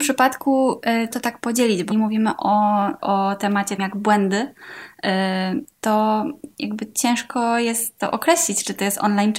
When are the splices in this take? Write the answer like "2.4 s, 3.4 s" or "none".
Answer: 1.1 s, 1.9 s, 3.0 s, 3.8 s